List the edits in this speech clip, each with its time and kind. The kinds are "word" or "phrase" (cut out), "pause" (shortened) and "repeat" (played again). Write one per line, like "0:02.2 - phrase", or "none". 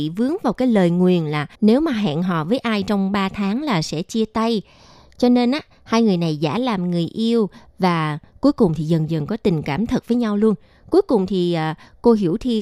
0:01.5 - pause